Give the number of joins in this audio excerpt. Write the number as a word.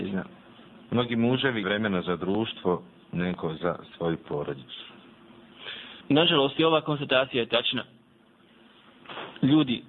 two